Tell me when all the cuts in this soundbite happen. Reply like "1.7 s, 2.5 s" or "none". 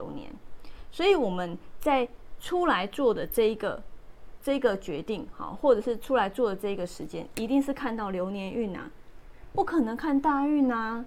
none